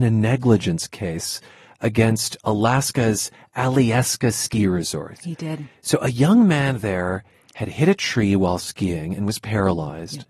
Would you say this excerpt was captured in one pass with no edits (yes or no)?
yes